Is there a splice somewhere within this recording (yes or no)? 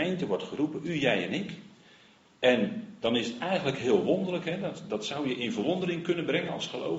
no